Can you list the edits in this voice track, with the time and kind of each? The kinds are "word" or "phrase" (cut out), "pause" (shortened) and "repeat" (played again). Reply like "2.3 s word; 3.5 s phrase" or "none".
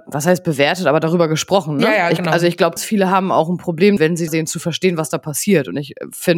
2.8 s word; 4.0 s word; 4.3 s phrase